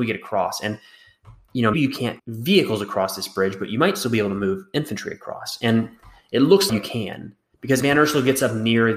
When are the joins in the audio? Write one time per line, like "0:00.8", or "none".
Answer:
0:01.7
0:02.2
0:06.7
0:07.8